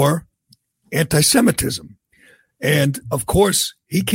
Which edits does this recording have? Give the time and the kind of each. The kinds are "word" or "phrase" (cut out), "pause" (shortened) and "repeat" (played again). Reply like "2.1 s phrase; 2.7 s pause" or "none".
none